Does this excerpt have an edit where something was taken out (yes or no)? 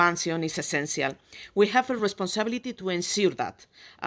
no